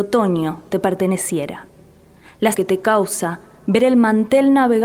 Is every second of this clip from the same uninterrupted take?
no; 1 cut; at 2.5 s

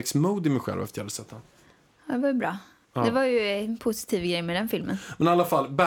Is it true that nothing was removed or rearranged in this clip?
yes; 0 cuts

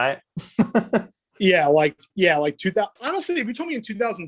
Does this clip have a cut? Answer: yes; 1 cut; at 3.0 s

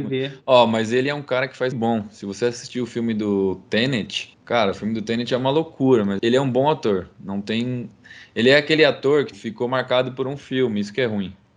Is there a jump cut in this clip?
yes; 4 cuts; at 1.7 s, 4.3 s, 6.2 s, 9.3 s

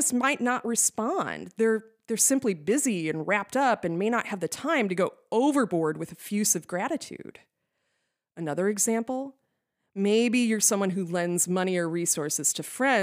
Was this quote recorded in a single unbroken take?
yes; 0 cuts

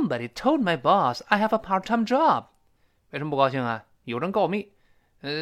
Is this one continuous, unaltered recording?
yes; 0 cuts

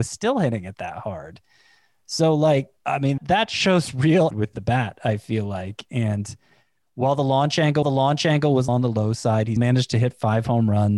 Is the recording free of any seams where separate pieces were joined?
no; 6 cuts; at 2.8 s, 3.2 s, 4.3 s, 7.8 s, 8.7 s, 9.6 s

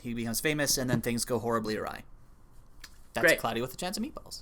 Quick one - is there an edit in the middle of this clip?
no; 0 cuts

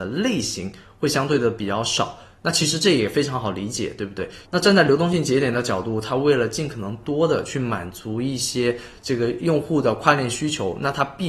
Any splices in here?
no; 0 cuts

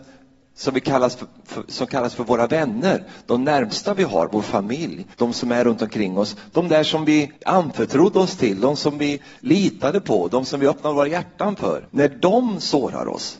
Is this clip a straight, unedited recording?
no; 3 cuts; at 5.1 s, 7.4 s, 11.9 s

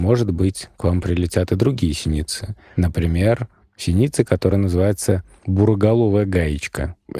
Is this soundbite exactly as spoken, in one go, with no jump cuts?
yes; 0 cuts

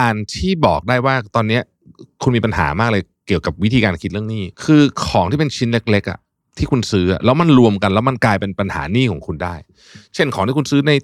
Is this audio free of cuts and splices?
no; 1 cut; at 4.5 s

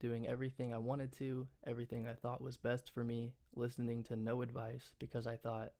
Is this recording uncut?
no; 1 cut; at 3.5 s

